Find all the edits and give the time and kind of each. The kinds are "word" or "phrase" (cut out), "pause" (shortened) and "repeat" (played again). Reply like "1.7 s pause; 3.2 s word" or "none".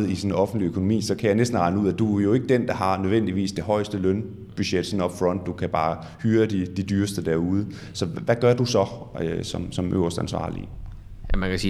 none